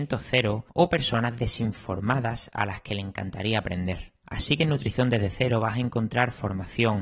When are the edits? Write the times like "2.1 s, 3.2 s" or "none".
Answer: 4.2 s